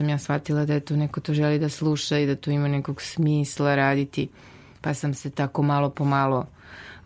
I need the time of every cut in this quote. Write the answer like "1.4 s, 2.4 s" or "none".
none